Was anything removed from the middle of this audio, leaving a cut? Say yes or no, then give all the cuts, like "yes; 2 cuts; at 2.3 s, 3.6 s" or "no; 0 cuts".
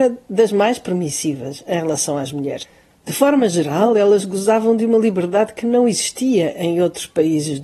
no; 0 cuts